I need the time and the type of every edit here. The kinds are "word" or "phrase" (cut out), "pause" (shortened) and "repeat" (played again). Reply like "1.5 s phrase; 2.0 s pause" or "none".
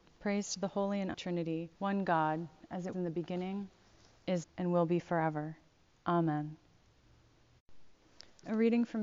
1.1 s word; 1.7 s pause; 2.9 s word; 4.4 s word